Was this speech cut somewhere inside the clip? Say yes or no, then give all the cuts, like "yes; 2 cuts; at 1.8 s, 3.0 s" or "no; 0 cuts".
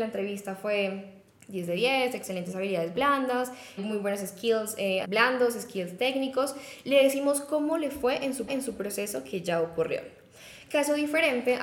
yes; 4 cuts; at 1.3 s, 3.8 s, 5.0 s, 8.5 s